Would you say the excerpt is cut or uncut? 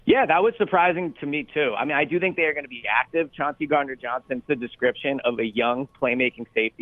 cut